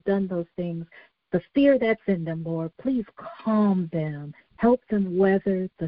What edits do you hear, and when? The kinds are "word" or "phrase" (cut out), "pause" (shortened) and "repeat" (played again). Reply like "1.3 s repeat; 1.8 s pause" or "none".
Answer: none

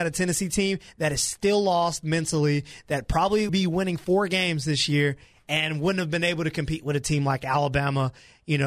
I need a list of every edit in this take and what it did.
3.5 s word

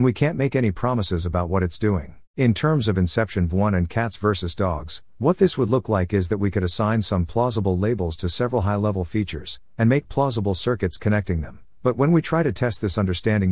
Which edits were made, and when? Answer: 2.3 s pause

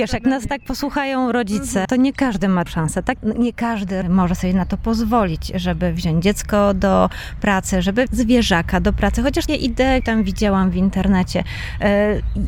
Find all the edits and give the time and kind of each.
1.8 s word; 2.7 s word; 4.0 s word; 8.1 s word; 9.5 s word; 10.0 s word

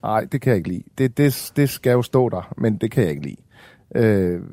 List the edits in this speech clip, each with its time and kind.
none

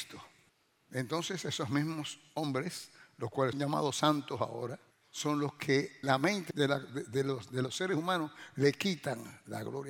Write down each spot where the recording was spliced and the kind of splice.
3.5 s word; 6.0 s word; 6.5 s word

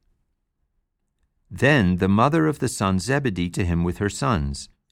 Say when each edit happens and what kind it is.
3.0 s word; 3.5 s word

